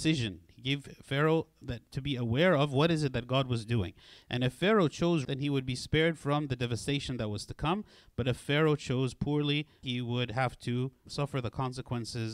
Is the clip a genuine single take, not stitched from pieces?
no; 4 cuts; at 1.6 s, 5.2 s, 9.8 s, 11.1 s

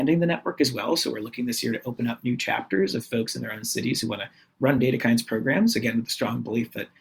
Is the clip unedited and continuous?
yes; 0 cuts

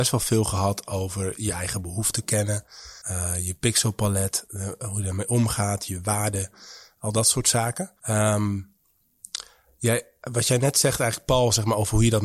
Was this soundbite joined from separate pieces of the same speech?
yes; 3 cuts; at 1.4 s, 3.0 s, 8.0 s

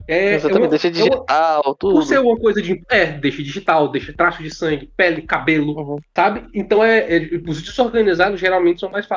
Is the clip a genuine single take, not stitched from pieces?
yes; 0 cuts

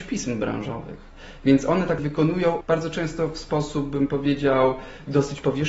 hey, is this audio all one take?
no; 2 cuts; at 2.0 s, 2.6 s

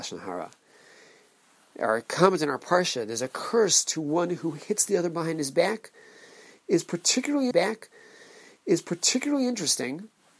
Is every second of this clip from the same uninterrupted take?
no; 1 cut; at 7.5 s

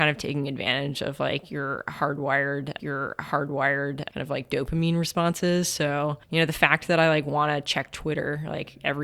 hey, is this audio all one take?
no; 1 cut; at 2.8 s

